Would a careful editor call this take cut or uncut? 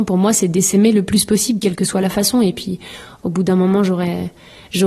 uncut